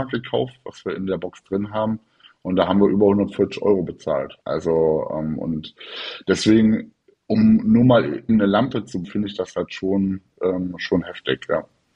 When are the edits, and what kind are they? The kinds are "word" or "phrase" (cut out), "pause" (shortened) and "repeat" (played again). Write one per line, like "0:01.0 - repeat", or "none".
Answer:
0:04.4 - pause
0:08.3 - word
0:09.0 - word